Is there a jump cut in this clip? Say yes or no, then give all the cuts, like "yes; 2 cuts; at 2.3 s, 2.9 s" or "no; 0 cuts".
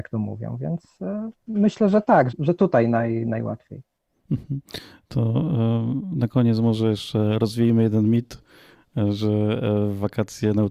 yes; 1 cut; at 2.3 s